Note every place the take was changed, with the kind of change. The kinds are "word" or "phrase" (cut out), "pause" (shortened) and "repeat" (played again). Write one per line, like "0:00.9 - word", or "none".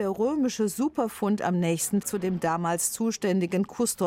0:02.0 - word